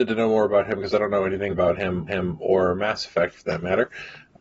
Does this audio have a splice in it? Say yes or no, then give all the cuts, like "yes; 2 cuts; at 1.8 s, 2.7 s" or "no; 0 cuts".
yes; 2 cuts; at 1.5 s, 2.1 s